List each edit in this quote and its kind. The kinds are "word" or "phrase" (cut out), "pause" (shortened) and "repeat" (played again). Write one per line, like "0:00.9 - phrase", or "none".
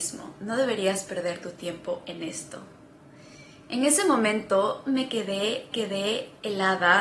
0:04.8 - word
0:05.7 - repeat